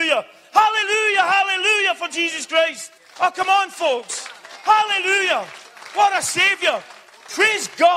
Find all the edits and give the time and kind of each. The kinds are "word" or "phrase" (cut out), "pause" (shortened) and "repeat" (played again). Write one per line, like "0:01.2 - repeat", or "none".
0:03.0 - pause